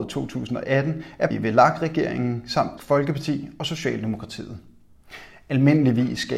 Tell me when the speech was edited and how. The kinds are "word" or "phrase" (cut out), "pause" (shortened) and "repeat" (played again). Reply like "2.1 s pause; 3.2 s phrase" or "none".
1.3 s word; 2.8 s word